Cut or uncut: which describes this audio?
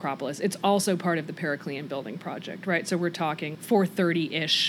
cut